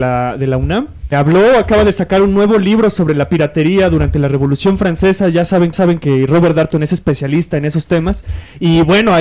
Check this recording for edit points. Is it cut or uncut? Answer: cut